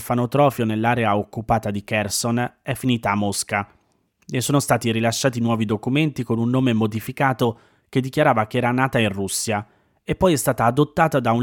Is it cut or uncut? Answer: uncut